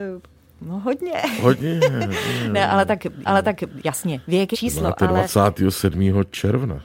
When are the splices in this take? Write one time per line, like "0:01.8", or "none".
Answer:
0:03.3
0:04.5